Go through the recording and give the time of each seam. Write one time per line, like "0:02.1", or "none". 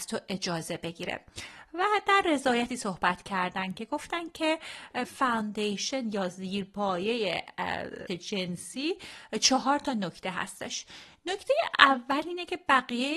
0:02.2
0:02.7
0:05.0
0:08.1